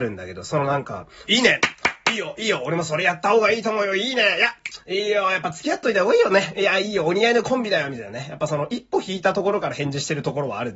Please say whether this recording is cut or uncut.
cut